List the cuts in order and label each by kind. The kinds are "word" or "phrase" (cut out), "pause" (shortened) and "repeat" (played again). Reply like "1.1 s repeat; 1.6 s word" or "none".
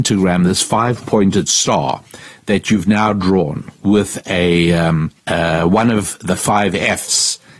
5.2 s pause